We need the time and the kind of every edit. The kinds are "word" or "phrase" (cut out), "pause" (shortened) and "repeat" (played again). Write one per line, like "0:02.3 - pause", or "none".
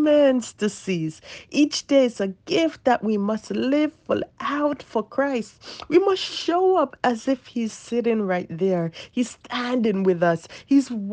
none